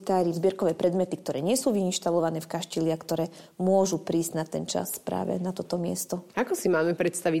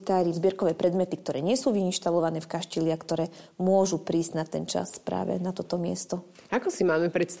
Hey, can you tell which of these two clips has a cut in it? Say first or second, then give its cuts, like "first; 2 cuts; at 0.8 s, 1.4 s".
first; 1 cut; at 6.3 s